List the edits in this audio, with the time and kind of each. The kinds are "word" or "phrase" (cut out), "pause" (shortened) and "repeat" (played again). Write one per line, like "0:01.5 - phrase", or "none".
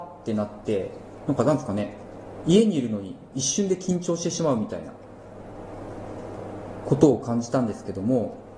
none